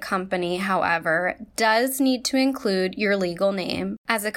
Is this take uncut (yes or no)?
yes